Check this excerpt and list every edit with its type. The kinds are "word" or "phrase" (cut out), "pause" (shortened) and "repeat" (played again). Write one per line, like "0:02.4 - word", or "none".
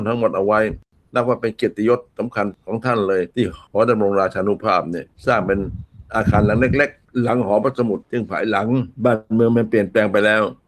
0:03.3 - pause
0:05.2 - pause
0:08.0 - pause
0:08.9 - pause